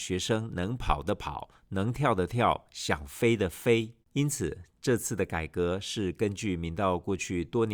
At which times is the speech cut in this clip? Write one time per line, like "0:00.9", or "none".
0:04.0